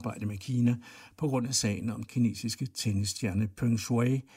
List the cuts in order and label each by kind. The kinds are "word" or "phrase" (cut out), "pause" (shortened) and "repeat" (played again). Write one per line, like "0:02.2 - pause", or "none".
0:02.0 - word